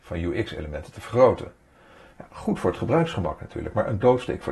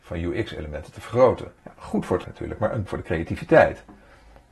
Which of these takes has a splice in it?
second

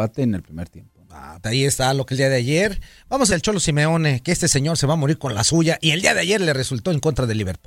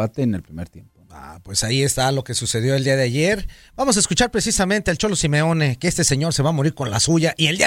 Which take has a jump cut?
first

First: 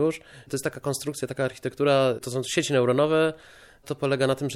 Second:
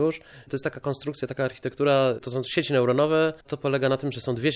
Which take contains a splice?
second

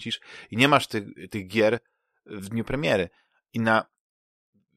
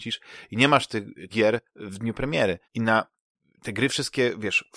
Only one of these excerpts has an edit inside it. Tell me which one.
second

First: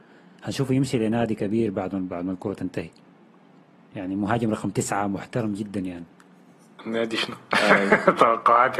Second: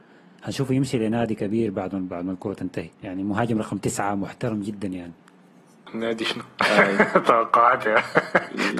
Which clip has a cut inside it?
second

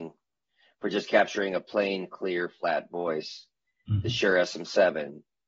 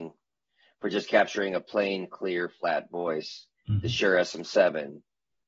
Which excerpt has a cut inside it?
second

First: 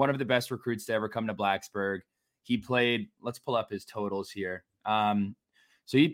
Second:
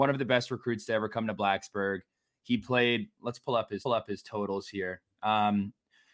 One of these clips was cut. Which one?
second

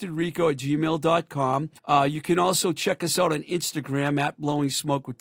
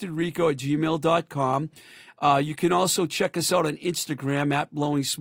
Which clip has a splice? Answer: first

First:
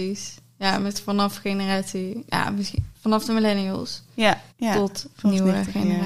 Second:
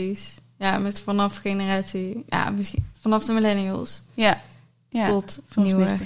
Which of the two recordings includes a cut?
first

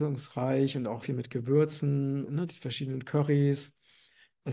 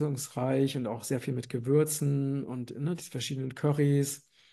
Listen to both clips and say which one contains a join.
first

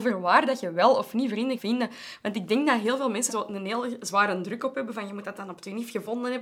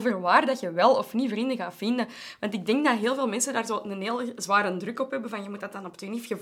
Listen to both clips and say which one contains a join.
first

